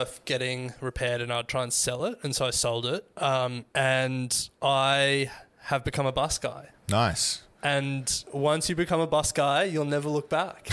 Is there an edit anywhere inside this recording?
yes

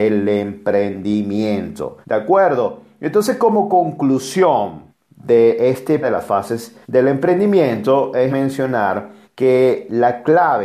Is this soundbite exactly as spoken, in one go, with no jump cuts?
no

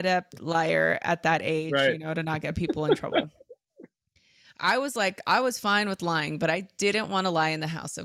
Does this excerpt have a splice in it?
no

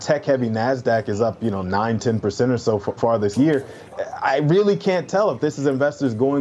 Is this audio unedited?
no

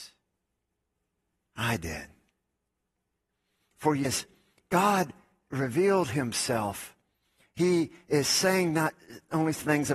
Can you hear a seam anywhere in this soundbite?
yes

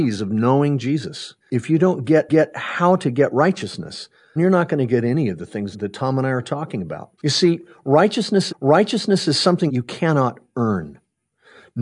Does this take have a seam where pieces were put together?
yes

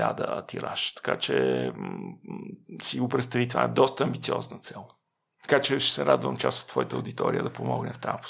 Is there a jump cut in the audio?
no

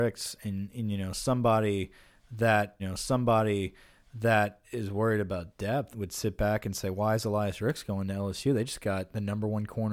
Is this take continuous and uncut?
no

